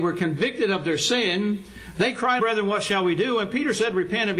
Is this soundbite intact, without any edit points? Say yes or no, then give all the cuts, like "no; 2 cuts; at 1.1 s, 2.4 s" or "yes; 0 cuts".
no; 1 cut; at 2.4 s